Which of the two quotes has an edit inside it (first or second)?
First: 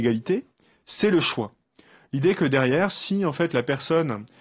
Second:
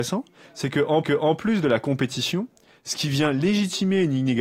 second